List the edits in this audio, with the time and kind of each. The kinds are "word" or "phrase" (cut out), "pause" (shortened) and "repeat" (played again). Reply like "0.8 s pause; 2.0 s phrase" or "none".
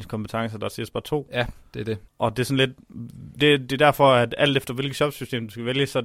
2.1 s pause